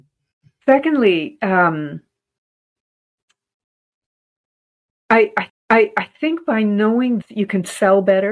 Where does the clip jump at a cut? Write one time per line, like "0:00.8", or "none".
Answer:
0:05.5
0:07.2